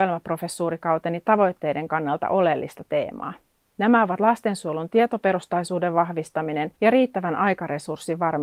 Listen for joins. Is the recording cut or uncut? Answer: cut